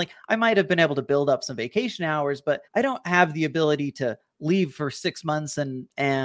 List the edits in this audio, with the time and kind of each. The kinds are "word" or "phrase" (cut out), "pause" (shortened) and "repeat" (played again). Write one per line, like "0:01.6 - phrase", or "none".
0:02.7 - pause